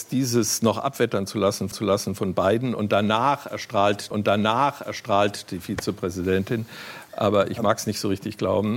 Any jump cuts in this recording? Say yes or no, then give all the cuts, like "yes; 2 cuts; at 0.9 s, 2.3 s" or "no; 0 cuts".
yes; 2 cuts; at 1.7 s, 4.1 s